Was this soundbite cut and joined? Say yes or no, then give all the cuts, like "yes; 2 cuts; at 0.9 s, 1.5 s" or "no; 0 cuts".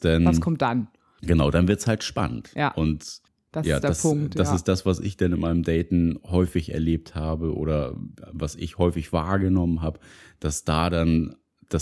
no; 0 cuts